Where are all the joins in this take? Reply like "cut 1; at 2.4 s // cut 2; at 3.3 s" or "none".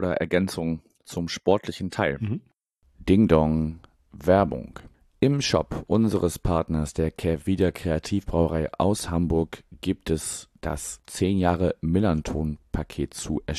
none